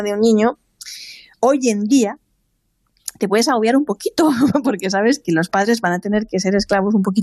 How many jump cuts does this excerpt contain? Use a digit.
2